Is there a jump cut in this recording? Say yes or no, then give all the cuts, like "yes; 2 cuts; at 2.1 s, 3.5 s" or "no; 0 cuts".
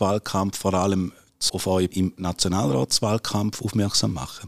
yes; 2 cuts; at 1.5 s, 1.9 s